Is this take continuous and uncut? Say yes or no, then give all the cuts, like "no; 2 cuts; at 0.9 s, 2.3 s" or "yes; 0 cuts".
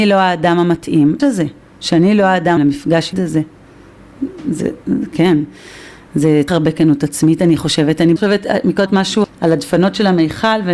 no; 7 cuts; at 1.2 s, 2.6 s, 3.1 s, 6.5 s, 8.2 s, 8.9 s, 9.2 s